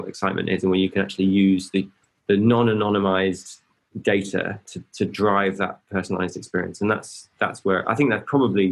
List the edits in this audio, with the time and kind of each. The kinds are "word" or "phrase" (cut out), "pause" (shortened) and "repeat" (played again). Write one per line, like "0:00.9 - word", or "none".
none